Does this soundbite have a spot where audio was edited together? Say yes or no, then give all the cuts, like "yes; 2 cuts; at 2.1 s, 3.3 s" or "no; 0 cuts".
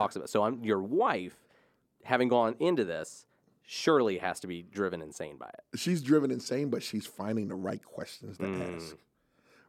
no; 0 cuts